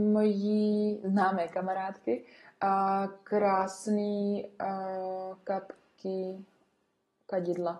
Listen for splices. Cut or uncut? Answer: uncut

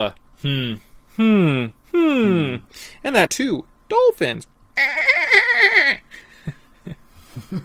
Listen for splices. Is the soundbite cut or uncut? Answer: cut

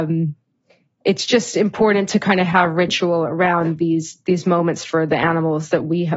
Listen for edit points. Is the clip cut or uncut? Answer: uncut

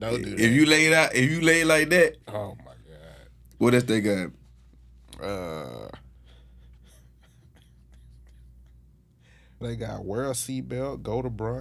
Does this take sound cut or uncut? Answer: cut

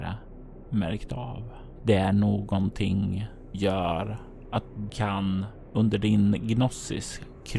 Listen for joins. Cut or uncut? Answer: cut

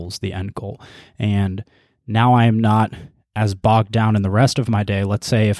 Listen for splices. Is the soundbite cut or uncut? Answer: uncut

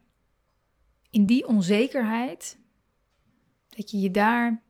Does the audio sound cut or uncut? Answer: uncut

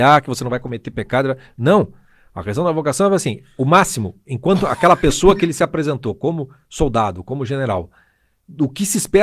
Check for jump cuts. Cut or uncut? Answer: uncut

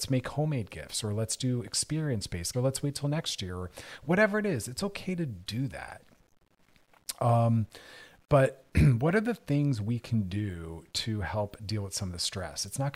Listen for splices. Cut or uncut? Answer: cut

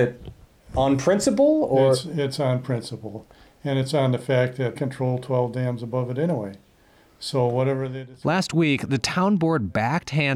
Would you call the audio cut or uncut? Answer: cut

